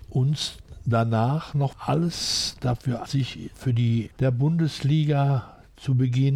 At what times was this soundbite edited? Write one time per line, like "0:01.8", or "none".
0:01.7
0:03.1
0:03.5
0:04.1